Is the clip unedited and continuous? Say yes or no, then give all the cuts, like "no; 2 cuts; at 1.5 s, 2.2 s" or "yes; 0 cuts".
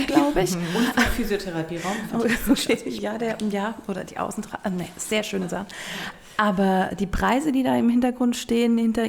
yes; 0 cuts